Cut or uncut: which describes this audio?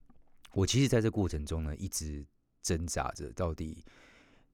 uncut